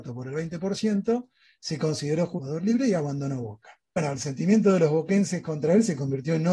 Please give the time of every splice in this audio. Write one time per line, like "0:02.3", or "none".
none